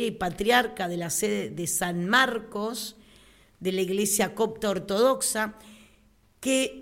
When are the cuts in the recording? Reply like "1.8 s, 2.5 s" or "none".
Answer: none

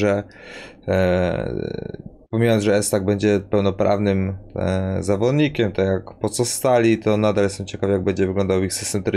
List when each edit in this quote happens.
2.3 s

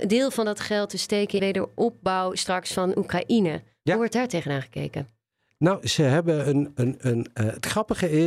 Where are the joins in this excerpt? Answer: 1.4 s

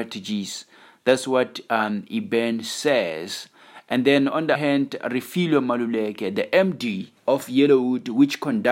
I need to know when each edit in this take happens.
4.6 s, 7.2 s

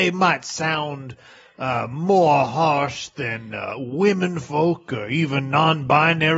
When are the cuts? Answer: none

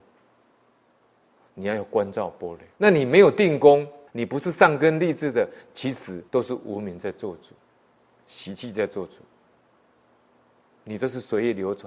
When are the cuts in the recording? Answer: 2.7 s, 4.1 s, 6.3 s

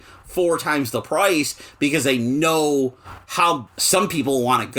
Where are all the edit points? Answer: 3.7 s

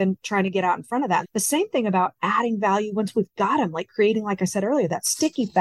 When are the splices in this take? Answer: 1.2 s

